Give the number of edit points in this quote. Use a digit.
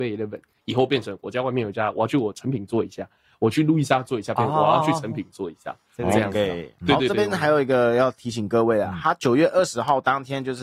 0